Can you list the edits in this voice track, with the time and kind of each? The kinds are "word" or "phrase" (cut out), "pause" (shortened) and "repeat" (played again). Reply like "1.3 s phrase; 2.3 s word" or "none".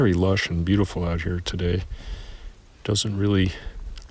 none